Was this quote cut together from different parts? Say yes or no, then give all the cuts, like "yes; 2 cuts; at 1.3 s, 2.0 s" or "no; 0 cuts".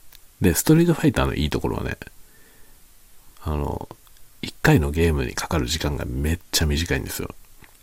yes; 1 cut; at 3.3 s